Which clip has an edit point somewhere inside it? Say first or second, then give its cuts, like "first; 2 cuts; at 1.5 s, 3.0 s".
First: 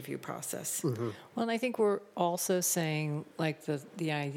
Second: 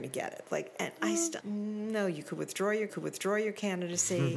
second; 2 cuts; at 1.4 s, 2.9 s